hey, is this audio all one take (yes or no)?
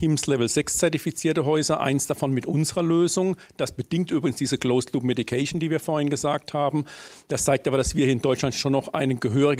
yes